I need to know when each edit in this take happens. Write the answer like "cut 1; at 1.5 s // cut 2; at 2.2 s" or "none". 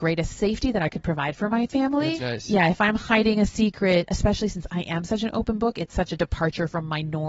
cut 1; at 2.2 s